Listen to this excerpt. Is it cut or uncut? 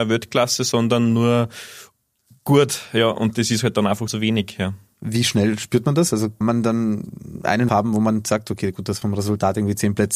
cut